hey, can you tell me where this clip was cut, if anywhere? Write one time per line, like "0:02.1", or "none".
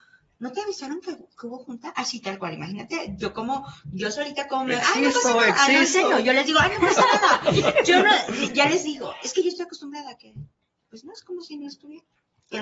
none